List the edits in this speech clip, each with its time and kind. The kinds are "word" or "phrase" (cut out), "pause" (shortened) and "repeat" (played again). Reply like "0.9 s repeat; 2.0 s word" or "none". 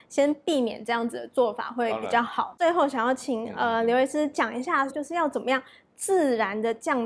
4.9 s word